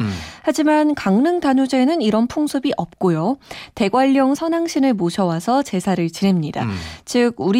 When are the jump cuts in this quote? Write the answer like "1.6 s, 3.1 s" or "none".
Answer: 4.4 s